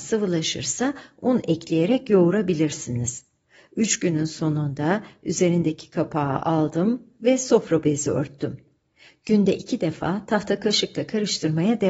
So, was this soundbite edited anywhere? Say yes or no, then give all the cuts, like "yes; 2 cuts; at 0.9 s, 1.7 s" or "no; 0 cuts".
no; 0 cuts